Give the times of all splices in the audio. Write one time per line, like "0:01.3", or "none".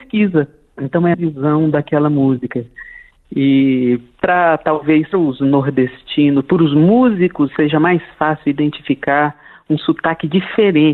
0:01.1
0:05.1
0:07.5